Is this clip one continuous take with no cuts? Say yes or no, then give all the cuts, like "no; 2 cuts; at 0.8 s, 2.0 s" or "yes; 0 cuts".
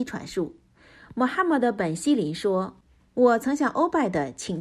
no; 1 cut; at 2.8 s